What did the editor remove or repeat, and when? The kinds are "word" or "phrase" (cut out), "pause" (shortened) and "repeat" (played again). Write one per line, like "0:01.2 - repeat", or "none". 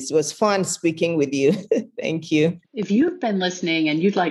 0:02.6 - pause